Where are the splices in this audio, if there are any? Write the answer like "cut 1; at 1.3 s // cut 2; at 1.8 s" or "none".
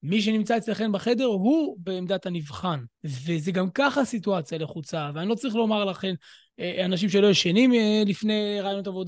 cut 1; at 2.9 s